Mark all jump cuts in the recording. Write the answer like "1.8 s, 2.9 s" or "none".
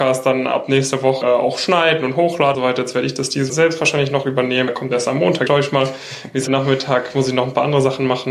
1.2 s, 2.5 s, 3.5 s, 4.7 s, 5.5 s, 6.5 s